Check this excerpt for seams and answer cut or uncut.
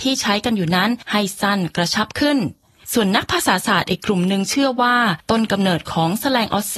uncut